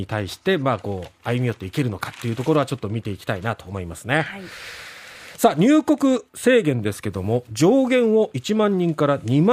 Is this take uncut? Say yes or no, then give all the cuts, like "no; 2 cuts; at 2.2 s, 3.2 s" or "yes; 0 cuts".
no; 1 cut; at 6.3 s